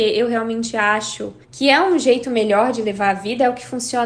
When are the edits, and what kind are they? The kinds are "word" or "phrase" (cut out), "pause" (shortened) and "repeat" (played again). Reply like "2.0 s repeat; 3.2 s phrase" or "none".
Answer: 1.4 s pause